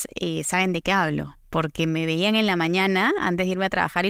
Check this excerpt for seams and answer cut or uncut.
cut